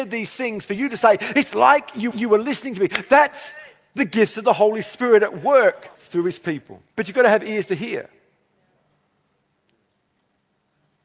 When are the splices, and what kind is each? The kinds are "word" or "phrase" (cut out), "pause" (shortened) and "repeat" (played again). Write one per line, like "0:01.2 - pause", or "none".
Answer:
0:02.1 - repeat
0:05.9 - pause
0:06.9 - pause